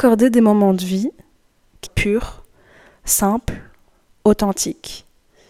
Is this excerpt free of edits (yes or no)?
no